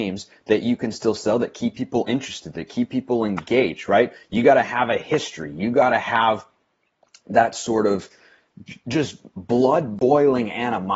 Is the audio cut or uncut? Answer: uncut